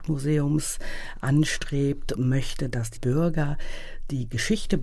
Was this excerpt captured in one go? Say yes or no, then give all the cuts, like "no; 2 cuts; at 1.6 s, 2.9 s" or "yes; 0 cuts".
no; 2 cuts; at 2.1 s, 3.0 s